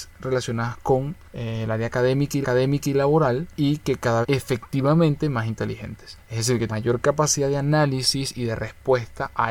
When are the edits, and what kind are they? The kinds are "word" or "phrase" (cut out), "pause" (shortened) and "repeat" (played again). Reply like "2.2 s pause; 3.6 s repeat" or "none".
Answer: 2.4 s repeat; 4.2 s phrase; 6.7 s word